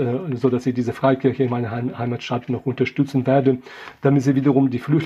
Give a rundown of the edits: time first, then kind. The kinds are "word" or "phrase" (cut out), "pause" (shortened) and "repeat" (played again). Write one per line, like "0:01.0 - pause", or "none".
none